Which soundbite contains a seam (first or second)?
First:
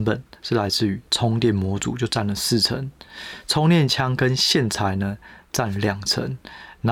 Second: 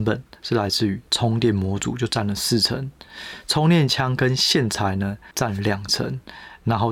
second